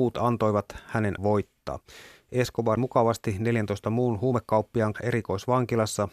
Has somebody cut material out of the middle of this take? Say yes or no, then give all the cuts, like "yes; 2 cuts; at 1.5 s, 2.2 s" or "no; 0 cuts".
yes; 3 cuts; at 1.2 s, 2.8 s, 4.9 s